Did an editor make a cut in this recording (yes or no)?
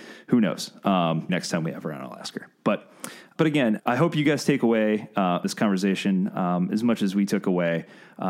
yes